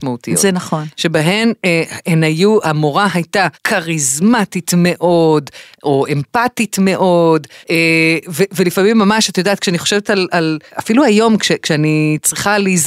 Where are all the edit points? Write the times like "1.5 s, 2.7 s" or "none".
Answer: 3.5 s, 7.6 s, 10.7 s